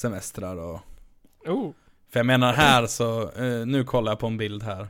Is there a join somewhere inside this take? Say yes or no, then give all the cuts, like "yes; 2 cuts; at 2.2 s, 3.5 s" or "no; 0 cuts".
no; 0 cuts